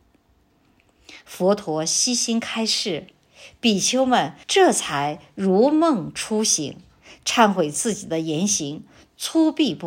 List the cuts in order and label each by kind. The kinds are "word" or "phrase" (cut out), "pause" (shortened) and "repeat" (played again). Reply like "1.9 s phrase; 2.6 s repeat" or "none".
4.4 s pause